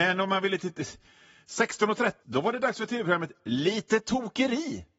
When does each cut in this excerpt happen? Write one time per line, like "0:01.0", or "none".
0:02.2